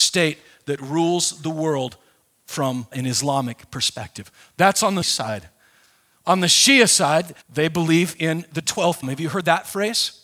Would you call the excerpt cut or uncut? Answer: cut